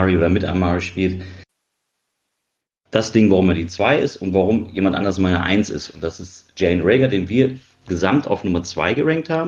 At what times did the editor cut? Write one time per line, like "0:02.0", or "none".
none